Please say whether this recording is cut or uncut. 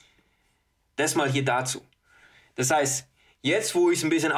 uncut